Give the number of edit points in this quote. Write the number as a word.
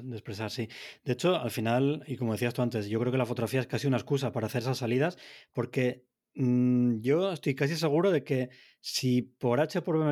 zero